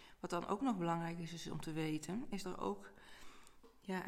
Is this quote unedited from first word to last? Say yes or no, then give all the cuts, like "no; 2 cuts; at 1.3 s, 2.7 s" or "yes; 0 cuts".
no; 1 cut; at 2.4 s